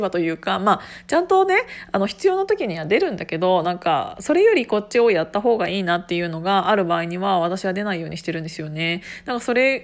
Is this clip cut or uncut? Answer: uncut